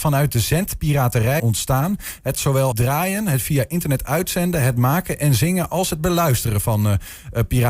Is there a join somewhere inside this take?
yes; 3 cuts; at 1.4 s, 2.3 s, 2.7 s

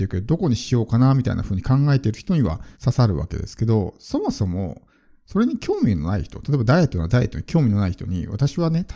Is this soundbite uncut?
no; 1 cut; at 2.7 s

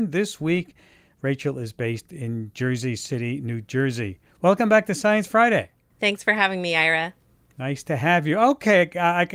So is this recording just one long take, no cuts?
yes; 0 cuts

